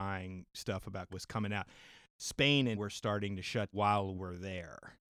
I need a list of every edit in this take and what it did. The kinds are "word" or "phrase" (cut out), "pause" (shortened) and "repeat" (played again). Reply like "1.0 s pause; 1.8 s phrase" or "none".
1.1 s word; 2.7 s word; 3.7 s word; 4.1 s word

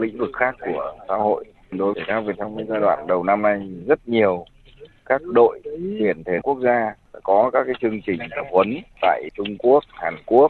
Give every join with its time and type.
1.9 s word; 2.3 s word; 6.4 s word; 9.3 s word

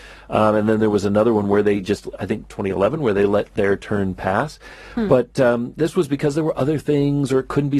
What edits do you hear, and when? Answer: none

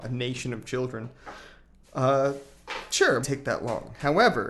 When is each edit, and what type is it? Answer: 3.2 s word

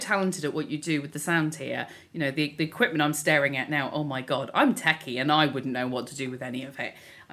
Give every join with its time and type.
none

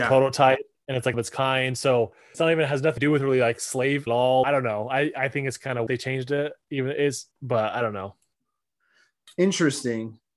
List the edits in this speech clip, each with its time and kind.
1.1 s phrase; 2.3 s word; 3.0 s word; 4.1 s phrase; 4.4 s phrase; 5.9 s phrase; 6.6 s pause; 7.3 s pause

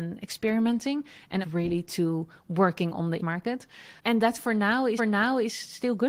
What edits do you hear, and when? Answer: 1.4 s phrase; 3.2 s word; 4.0 s pause; 5.0 s repeat

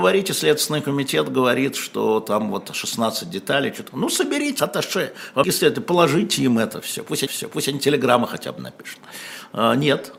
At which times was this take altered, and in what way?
4.6 s word; 5.4 s phrase; 7.3 s repeat

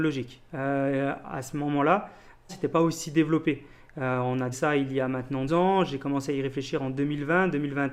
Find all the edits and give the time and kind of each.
2.5 s word; 4.5 s word; 5.5 s word

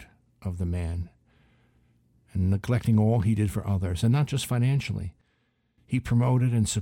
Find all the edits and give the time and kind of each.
none

